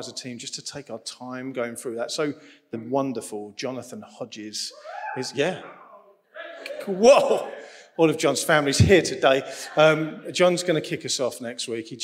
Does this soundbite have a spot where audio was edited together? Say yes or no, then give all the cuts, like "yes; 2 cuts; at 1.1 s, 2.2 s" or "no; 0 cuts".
yes; 1 cut; at 2.7 s